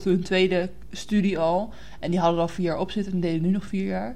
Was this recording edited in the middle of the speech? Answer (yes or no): no